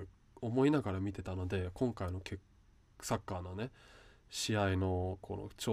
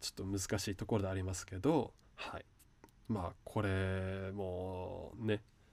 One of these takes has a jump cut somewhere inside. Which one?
second; 1 cut; at 2.0 s

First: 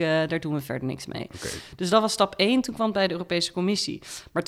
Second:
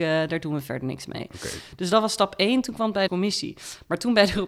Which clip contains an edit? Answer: second; 1 cut; at 3.1 s

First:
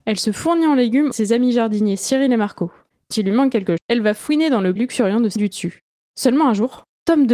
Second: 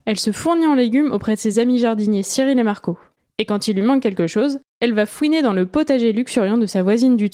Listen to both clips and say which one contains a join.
first; 5 cuts; at 1.1 s, 3.1 s, 3.8 s, 4.8 s, 5.4 s

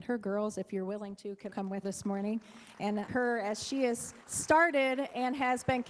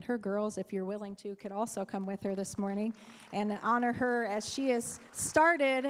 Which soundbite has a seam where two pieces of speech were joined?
first; 3 cuts; at 1.5 s, 1.8 s, 3.1 s

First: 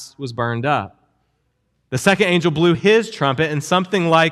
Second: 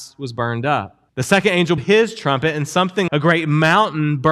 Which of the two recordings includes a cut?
second; 3 cuts; at 1.1 s, 1.8 s, 3.1 s

